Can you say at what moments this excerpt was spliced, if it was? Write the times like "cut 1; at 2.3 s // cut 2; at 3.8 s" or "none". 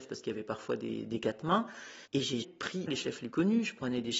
cut 1; at 2.0 s // cut 2; at 2.4 s // cut 3; at 2.9 s // cut 4; at 3.3 s